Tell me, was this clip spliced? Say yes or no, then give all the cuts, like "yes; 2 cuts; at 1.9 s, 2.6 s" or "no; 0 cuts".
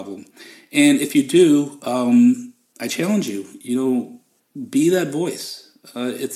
no; 0 cuts